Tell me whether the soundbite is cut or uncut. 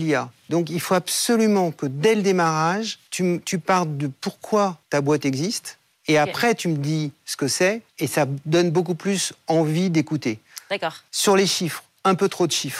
cut